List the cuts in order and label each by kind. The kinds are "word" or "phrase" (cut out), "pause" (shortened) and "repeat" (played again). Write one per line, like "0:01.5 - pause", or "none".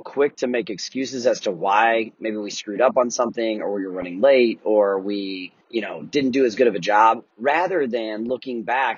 0:05.6 - pause
0:07.3 - pause